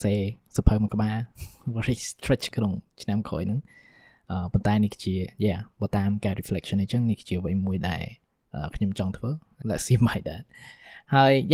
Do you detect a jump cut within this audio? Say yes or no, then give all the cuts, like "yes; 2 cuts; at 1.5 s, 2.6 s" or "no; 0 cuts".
yes; 2 cuts; at 2.5 s, 9.6 s